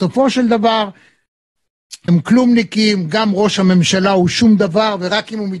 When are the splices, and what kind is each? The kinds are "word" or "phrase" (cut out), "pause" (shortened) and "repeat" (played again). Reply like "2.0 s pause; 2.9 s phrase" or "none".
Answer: 2.1 s word